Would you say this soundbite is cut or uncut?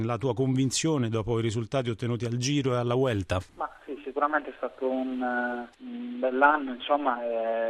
uncut